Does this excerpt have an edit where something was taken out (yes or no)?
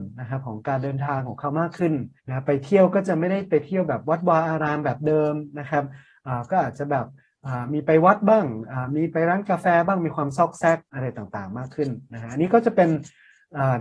yes